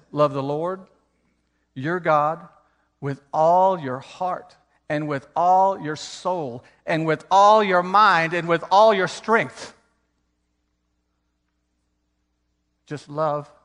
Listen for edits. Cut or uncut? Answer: uncut